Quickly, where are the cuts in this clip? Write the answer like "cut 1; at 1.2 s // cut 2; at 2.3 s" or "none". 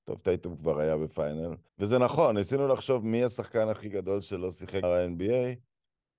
cut 1; at 1.7 s // cut 2; at 4.8 s